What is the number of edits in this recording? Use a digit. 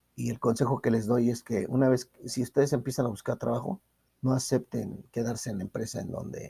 1